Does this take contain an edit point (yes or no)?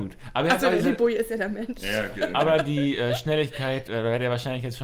no